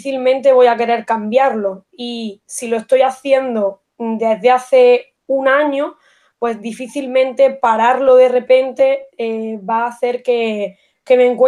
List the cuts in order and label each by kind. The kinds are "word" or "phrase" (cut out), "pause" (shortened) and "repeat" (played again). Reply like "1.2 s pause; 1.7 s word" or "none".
5.2 s pause; 9.1 s word